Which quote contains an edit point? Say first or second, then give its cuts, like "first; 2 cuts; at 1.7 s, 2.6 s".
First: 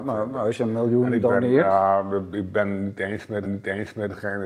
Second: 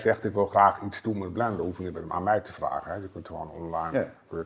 first; 1 cut; at 3.4 s